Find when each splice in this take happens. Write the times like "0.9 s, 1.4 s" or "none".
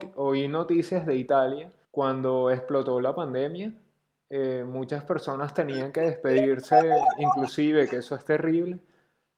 1.8 s